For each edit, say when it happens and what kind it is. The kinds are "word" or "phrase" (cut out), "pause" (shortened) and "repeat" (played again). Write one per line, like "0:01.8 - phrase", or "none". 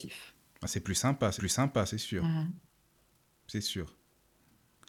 0:01.4 - repeat